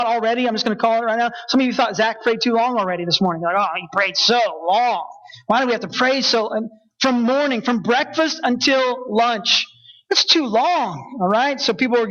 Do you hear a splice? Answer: no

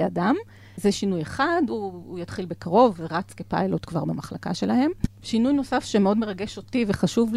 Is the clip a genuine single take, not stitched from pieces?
yes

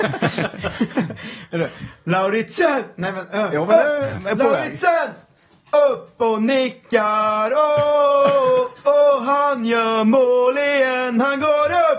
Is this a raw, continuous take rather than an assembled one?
yes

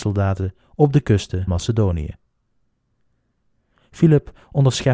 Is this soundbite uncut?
no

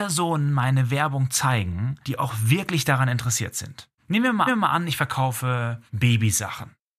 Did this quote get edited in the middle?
yes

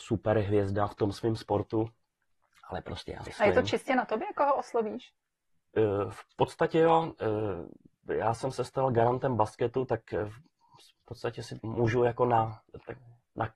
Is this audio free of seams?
no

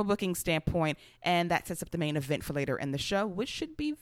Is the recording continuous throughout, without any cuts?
yes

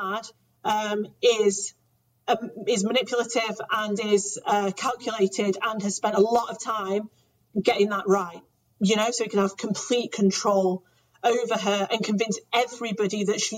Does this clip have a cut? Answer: no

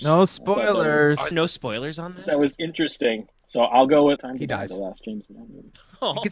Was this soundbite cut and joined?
yes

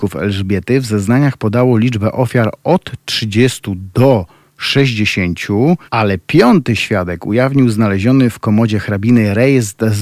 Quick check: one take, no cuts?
no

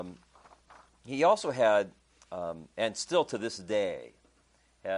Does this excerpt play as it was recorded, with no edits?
yes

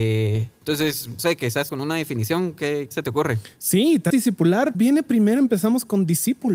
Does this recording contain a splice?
yes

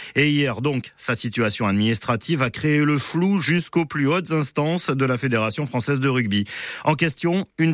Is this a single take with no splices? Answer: yes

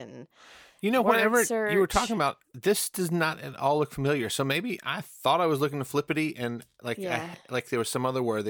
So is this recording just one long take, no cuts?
yes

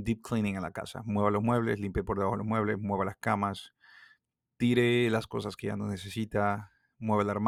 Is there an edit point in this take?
no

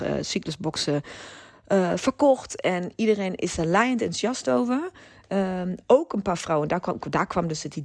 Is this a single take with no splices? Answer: yes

